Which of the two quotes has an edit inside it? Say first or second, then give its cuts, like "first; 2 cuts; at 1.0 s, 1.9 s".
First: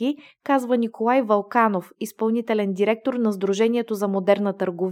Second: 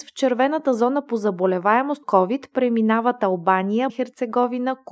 second; 2 cuts; at 2.0 s, 3.9 s